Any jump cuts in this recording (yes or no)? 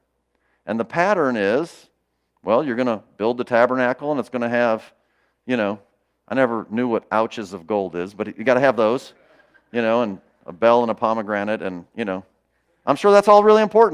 no